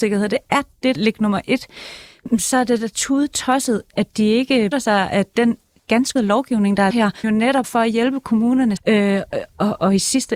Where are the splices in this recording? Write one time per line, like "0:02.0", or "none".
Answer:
0:01.0
0:03.9
0:04.7
0:06.2
0:06.9
0:07.2
0:07.6
0:08.8